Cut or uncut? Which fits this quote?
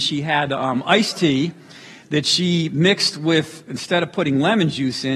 uncut